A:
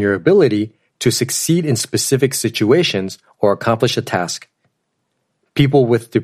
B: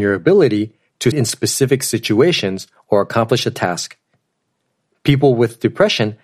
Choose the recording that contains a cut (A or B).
B